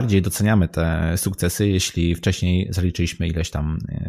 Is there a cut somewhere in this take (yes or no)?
no